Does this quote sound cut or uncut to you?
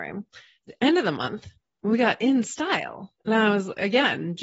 uncut